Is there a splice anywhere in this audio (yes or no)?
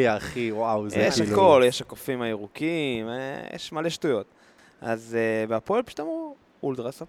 no